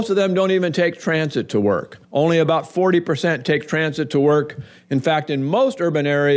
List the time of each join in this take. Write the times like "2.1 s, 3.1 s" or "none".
2.0 s